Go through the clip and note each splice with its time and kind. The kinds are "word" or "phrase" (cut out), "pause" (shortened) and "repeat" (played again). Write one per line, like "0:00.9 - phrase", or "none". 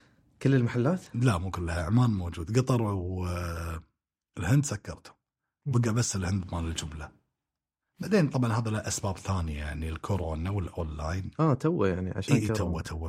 none